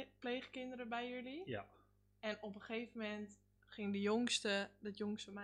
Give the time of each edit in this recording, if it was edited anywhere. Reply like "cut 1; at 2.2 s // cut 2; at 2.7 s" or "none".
none